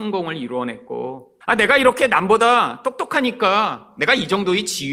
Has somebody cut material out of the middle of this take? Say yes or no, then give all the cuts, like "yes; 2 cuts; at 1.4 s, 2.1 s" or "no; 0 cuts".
yes; 1 cut; at 1.4 s